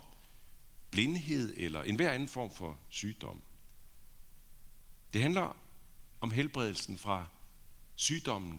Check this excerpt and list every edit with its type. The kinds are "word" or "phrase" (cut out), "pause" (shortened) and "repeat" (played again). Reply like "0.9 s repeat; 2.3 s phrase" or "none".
none